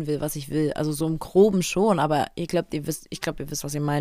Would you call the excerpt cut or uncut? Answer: uncut